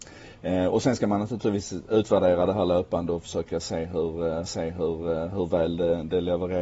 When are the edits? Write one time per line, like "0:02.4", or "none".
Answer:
0:04.5